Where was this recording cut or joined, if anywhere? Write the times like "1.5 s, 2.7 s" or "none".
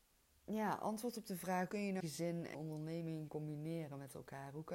1.7 s, 2.0 s, 2.5 s, 3.3 s